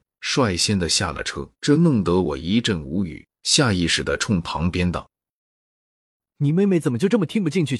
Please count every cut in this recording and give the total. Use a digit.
2